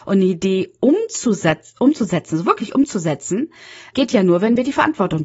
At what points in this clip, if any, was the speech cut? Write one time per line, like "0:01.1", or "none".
0:03.9